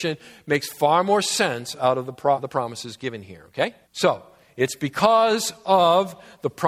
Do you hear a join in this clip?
yes; 2 cuts; at 2.4 s, 3.8 s

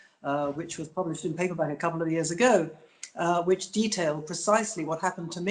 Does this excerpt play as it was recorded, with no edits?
yes; 0 cuts

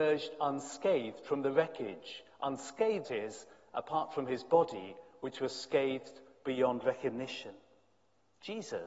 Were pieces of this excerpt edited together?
yes; 1 cut; at 3.0 s

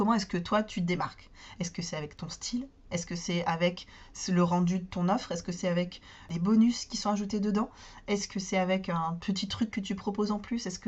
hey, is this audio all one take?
yes; 0 cuts

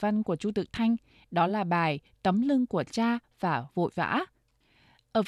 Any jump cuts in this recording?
no; 0 cuts

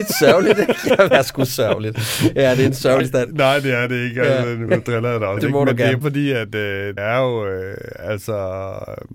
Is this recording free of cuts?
no; 6 cuts; at 1.1 s, 3.0 s, 4.7 s, 5.4 s, 6.0 s, 7.0 s

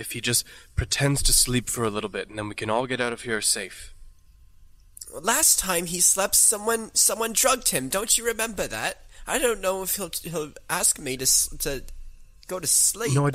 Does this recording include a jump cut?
no; 0 cuts

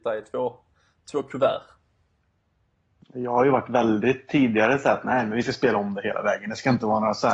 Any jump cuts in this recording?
no; 0 cuts

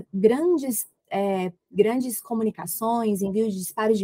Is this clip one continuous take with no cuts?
yes; 0 cuts

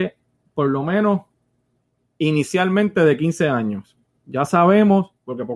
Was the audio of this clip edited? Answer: no; 0 cuts

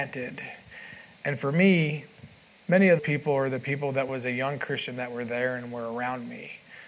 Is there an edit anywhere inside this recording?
yes; 4 cuts; at 1.1 s, 2.5 s, 3.0 s, 4.1 s

